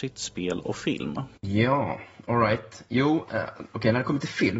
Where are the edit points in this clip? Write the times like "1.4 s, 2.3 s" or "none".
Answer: 1.4 s